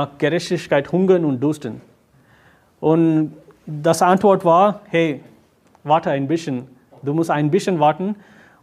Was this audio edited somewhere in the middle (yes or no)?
no